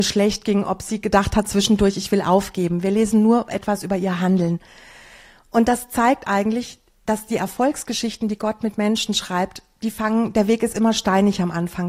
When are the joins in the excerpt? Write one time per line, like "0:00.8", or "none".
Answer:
none